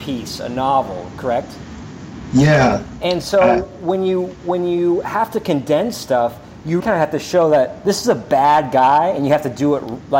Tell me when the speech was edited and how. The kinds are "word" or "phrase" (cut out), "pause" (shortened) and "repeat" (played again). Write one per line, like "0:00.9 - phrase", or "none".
0:06.8 - word